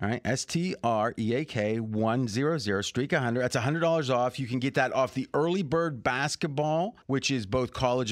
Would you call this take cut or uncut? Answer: cut